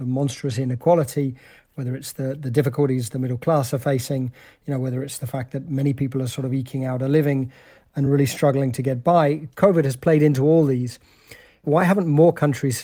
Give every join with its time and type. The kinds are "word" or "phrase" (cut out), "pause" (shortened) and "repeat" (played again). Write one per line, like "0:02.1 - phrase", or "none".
none

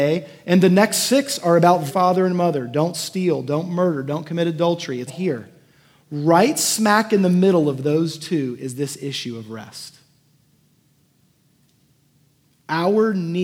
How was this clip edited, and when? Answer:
0:01.9 - phrase
0:05.1 - word

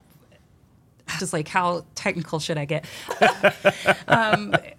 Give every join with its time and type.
0:01.2 - phrase
0:03.1 - word

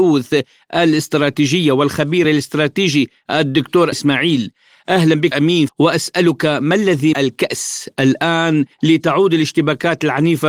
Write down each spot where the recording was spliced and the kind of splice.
0:02.2 - word
0:03.9 - word
0:05.3 - word
0:05.7 - phrase
0:07.1 - word
0:08.7 - pause

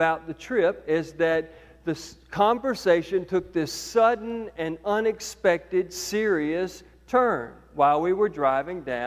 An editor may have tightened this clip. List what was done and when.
none

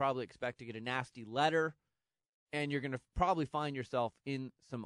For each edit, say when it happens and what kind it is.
none

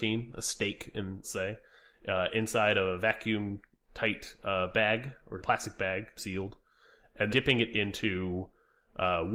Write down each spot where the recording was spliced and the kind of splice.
0:01.2 - word
0:05.4 - word
0:06.2 - word
0:07.3 - word

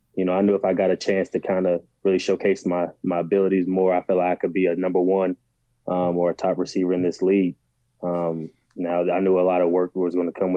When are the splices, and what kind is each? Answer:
none

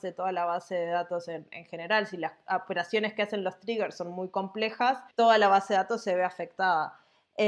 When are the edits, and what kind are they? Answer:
0:05.1 - pause

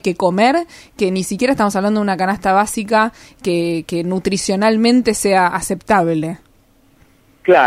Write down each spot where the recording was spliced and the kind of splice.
none

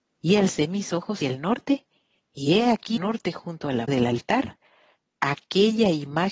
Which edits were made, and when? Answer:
0:01.2 - word
0:03.0 - word
0:03.9 - word

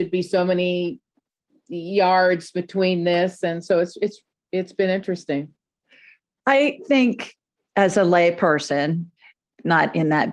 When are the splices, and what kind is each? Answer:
none

